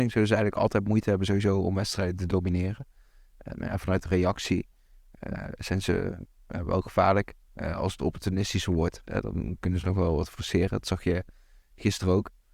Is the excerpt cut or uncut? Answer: uncut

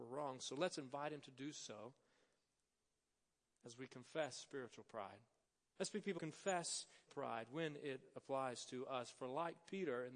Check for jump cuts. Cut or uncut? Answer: cut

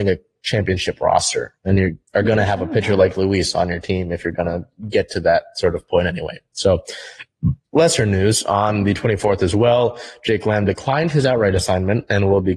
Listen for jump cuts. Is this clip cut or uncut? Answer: cut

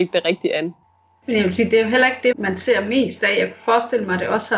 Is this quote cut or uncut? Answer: cut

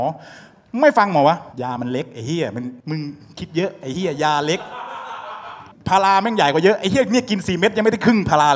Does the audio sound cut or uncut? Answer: cut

